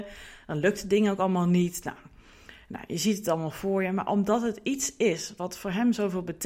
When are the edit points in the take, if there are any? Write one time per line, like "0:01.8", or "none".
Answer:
none